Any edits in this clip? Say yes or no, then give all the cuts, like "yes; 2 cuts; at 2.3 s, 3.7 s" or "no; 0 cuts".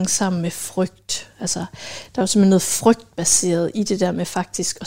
no; 0 cuts